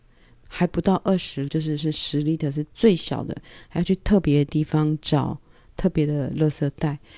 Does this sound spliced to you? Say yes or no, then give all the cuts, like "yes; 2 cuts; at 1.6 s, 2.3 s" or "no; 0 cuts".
yes; 1 cut; at 1.5 s